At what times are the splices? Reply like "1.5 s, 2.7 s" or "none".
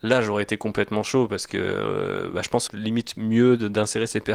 2.7 s